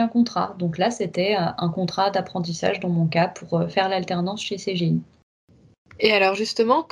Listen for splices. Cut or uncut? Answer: uncut